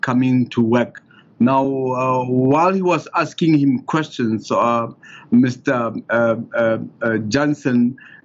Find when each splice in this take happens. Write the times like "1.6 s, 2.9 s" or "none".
none